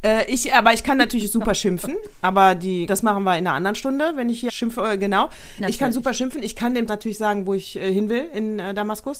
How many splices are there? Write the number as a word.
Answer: three